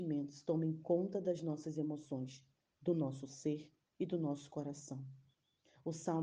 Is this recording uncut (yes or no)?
yes